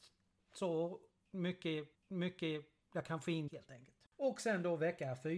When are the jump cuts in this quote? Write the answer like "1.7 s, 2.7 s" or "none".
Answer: 1.9 s, 3.5 s, 4.1 s